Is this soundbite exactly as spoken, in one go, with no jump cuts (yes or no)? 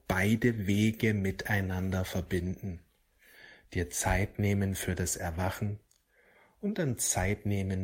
yes